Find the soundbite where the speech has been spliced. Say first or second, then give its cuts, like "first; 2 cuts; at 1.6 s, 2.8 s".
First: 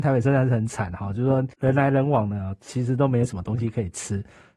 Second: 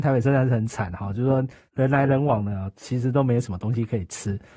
first; 1 cut; at 1.5 s